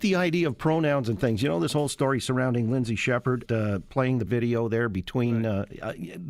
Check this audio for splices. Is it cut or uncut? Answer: cut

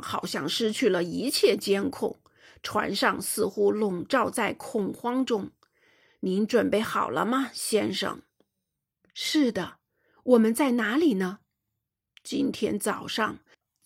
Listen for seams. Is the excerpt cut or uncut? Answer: uncut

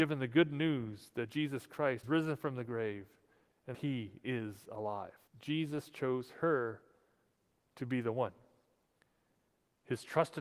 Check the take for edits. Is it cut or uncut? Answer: cut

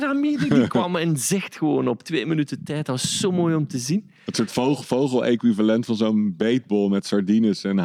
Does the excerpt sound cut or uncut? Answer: uncut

